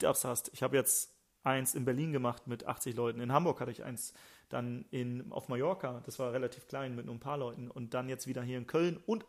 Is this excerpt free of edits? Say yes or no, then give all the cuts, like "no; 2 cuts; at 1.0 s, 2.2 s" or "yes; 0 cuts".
yes; 0 cuts